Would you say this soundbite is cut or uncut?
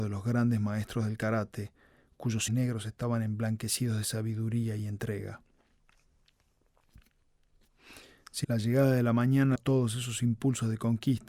cut